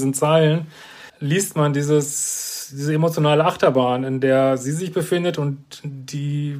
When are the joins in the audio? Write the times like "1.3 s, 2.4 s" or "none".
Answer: 1.1 s